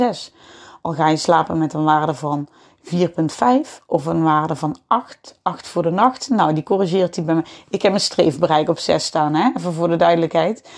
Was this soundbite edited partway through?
no; 0 cuts

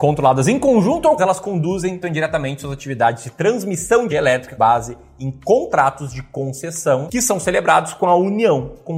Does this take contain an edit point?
yes; 4 cuts; at 1.2 s, 2.0 s, 4.1 s, 4.6 s

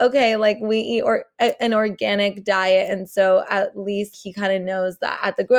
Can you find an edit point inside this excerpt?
yes; 1 cut; at 4.1 s

